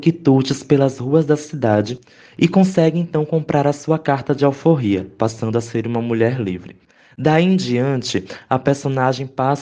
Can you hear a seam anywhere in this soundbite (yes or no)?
no